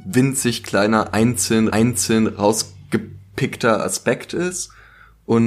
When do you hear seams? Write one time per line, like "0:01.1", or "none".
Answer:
0:01.7